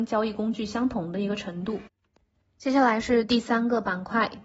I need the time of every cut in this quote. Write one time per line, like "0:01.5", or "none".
none